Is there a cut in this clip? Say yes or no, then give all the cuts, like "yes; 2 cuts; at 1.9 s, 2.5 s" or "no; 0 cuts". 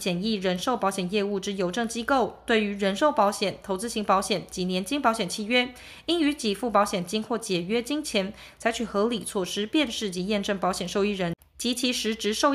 no; 0 cuts